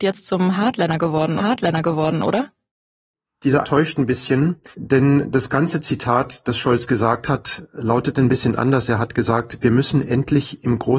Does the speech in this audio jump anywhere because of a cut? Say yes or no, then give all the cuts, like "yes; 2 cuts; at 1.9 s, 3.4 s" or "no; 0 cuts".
yes; 3 cuts; at 1.4 s, 3.6 s, 4.7 s